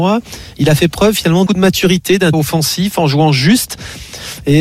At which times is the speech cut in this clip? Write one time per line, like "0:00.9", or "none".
0:01.5
0:02.3